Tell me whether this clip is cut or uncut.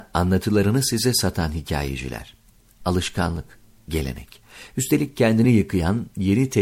uncut